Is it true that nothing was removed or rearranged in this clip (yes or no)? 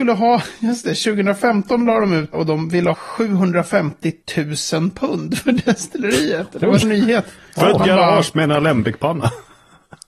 no